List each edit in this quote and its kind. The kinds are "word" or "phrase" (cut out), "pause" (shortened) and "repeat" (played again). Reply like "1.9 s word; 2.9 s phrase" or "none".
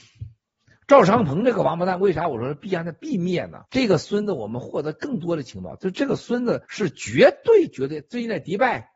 3.7 s pause; 6.6 s pause